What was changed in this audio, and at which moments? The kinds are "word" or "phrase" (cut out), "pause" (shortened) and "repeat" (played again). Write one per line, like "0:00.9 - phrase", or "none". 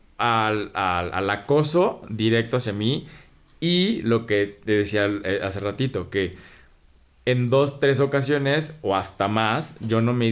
none